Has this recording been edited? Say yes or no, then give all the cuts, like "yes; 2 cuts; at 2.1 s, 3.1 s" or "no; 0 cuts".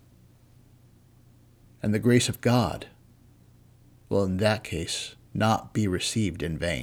no; 0 cuts